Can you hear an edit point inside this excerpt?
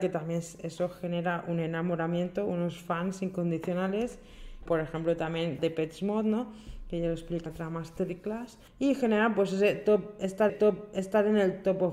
yes; 5 cuts; at 4.7 s, 5.6 s, 7.5 s, 8.7 s, 10.5 s

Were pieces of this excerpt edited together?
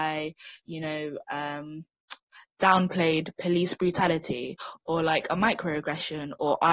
no; 0 cuts

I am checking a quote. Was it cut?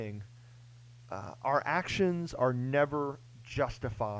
no; 0 cuts

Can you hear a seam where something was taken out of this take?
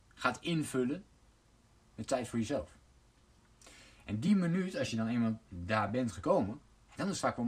no; 0 cuts

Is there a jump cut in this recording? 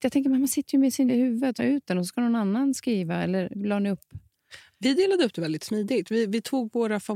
yes; 3 cuts; at 1.1 s, 1.6 s, 3.5 s

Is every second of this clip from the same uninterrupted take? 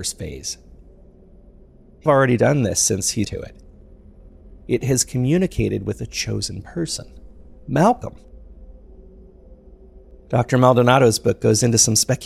no; 2 cuts; at 2.1 s, 3.2 s

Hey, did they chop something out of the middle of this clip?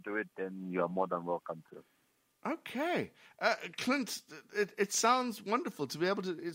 no; 0 cuts

